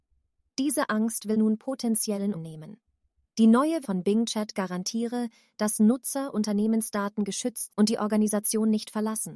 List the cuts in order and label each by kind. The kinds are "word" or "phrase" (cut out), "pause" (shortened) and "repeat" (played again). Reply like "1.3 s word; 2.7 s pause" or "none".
1.3 s word; 2.3 s word; 3.8 s word; 6.3 s word; 7.7 s word